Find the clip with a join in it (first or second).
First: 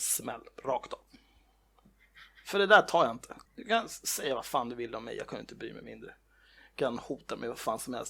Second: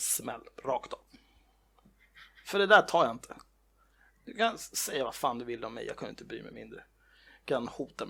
first